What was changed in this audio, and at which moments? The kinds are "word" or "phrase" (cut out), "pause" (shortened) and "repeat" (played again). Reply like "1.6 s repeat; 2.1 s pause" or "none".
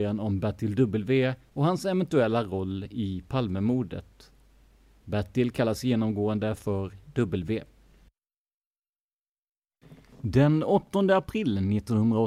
none